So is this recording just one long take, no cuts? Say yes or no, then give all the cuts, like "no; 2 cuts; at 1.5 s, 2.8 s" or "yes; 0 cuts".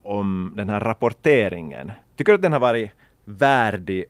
no; 1 cut; at 2.0 s